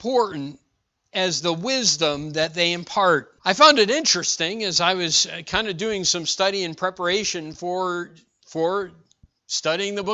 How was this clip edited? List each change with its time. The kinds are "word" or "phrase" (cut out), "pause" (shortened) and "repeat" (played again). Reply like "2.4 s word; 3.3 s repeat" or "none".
3.4 s pause